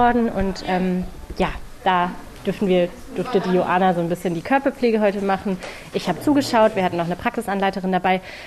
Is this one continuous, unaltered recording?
yes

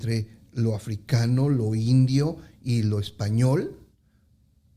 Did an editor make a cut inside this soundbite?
no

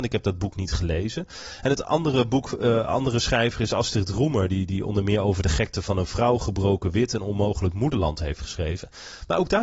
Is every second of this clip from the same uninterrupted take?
yes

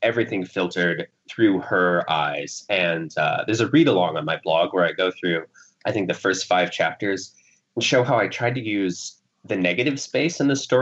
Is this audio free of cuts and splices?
yes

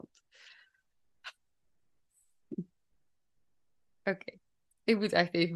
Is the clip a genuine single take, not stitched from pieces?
yes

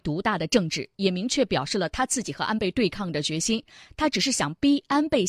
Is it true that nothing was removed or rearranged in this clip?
yes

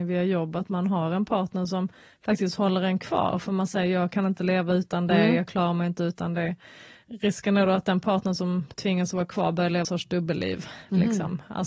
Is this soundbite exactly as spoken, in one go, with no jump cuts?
no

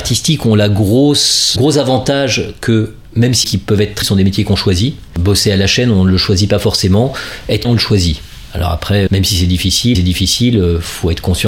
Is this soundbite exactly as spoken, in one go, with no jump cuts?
no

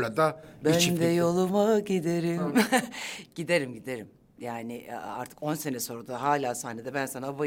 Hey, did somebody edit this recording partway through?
no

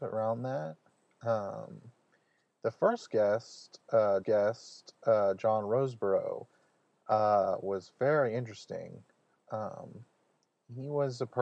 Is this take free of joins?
no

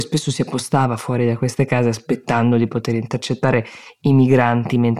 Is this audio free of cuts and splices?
yes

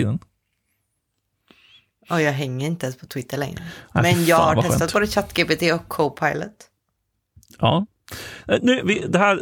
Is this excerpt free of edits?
yes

